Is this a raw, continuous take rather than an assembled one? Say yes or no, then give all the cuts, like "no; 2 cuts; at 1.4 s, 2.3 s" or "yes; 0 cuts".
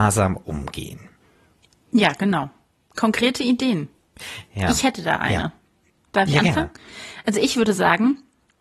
yes; 0 cuts